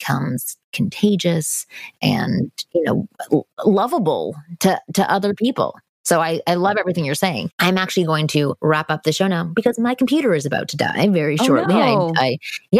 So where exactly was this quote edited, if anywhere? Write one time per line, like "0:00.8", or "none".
0:07.5